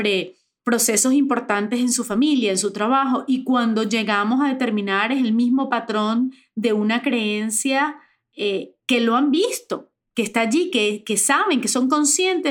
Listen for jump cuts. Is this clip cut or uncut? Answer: uncut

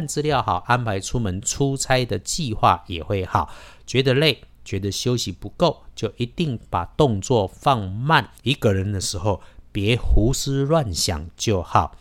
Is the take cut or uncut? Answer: cut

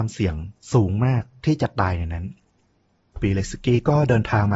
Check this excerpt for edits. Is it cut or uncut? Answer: uncut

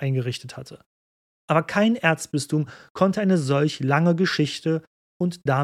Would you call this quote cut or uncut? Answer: uncut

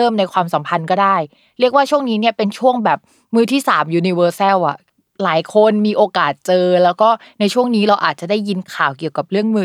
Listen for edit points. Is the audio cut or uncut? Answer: uncut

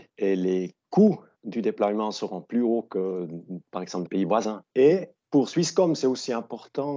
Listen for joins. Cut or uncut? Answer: cut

